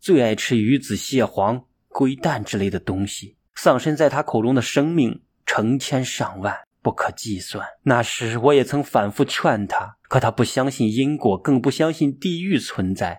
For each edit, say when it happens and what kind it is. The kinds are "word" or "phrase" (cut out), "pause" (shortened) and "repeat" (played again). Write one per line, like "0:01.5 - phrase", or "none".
0:03.5 - pause
0:06.7 - pause
0:07.8 - pause
0:10.0 - pause